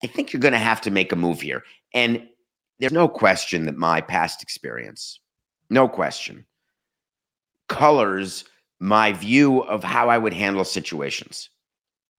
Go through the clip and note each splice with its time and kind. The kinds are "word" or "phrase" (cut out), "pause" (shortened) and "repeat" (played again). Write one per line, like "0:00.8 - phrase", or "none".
0:02.9 - word